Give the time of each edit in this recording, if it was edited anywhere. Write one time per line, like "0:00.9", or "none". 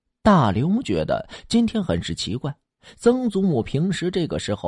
none